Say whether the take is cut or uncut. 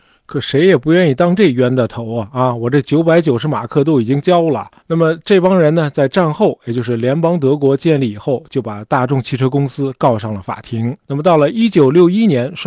cut